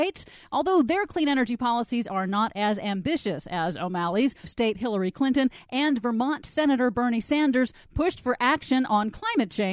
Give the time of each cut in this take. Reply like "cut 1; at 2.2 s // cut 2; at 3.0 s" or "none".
cut 1; at 4.4 s